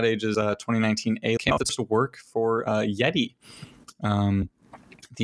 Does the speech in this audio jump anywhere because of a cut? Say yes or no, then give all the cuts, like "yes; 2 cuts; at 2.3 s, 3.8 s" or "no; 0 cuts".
yes; 1 cut; at 1.4 s